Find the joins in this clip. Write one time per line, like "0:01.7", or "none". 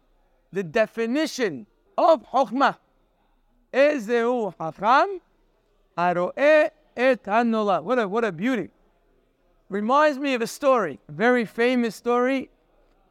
0:01.9
0:11.0